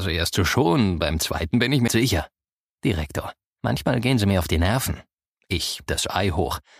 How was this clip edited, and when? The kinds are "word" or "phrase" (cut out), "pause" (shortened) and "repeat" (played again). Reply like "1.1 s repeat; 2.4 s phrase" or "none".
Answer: 1.9 s word; 5.9 s word